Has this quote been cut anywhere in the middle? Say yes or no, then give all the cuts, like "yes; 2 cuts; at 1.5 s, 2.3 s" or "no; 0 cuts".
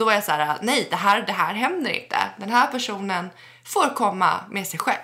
no; 0 cuts